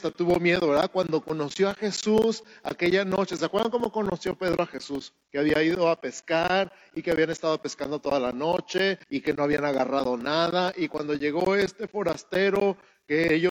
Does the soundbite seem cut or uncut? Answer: cut